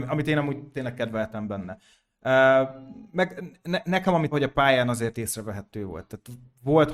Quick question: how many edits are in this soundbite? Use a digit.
1